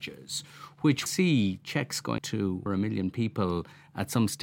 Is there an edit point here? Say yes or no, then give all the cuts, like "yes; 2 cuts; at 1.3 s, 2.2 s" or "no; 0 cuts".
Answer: yes; 3 cuts; at 1.1 s, 2.2 s, 2.7 s